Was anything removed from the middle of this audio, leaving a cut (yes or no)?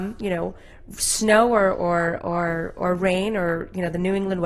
no